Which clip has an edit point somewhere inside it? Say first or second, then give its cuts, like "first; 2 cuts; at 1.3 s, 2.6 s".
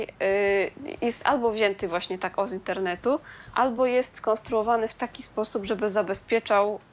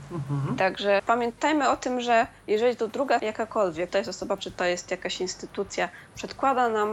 second; 4 cuts; at 1.0 s, 3.2 s, 3.9 s, 4.4 s